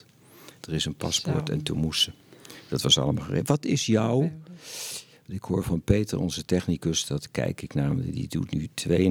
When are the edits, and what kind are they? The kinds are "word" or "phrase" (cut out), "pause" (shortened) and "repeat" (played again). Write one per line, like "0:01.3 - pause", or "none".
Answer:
none

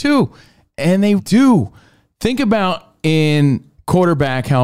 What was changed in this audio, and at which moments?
0:01.2 - word

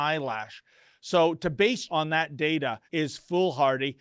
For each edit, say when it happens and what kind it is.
0:01.9 - word
0:02.9 - pause

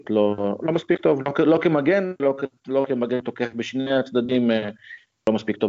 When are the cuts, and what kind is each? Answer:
none

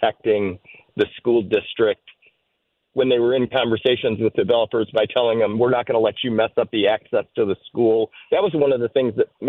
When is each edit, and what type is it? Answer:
none

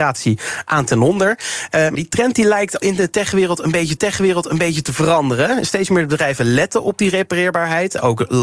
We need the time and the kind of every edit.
0:01.9 - word
0:02.8 - word
0:04.0 - repeat

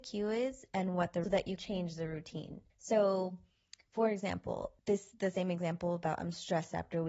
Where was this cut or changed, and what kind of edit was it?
0:01.2 - phrase
0:01.6 - word
0:02.7 - pause
0:04.8 - word

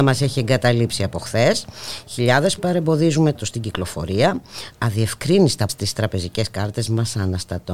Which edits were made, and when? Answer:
0:02.6 - word
0:03.3 - word
0:05.7 - word

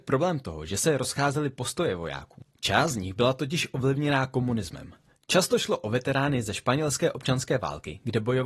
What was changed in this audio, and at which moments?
none

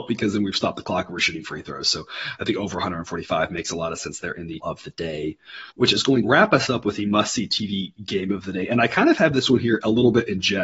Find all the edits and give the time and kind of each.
0:04.6 - word
0:05.7 - pause
0:06.2 - word

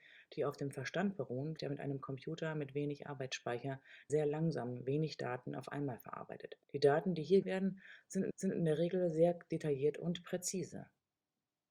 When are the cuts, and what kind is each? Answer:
0:01.6 - word
0:04.1 - word
0:06.6 - pause
0:07.4 - word
0:08.3 - repeat

